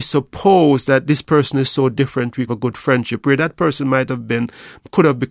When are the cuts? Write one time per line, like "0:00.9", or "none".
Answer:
0:02.5